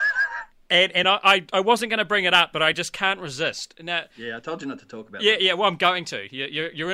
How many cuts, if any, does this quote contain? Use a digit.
0